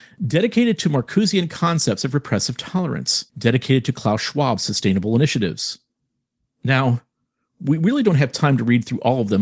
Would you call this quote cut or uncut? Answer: cut